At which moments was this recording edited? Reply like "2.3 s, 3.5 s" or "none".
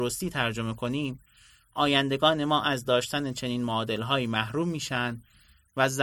none